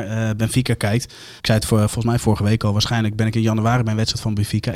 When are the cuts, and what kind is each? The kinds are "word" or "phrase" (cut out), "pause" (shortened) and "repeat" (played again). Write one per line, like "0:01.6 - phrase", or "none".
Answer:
0:01.4 - pause